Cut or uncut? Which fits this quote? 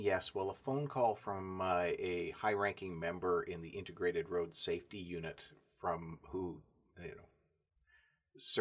uncut